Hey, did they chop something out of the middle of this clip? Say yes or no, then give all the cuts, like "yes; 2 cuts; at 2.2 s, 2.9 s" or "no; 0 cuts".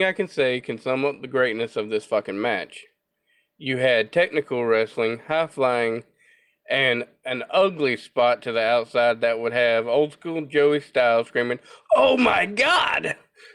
no; 0 cuts